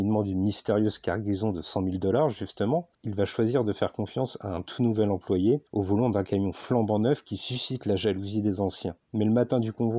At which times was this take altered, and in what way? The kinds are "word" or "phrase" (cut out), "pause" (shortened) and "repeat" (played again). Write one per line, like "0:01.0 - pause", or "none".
0:02.9 - pause
0:05.7 - pause
0:09.0 - pause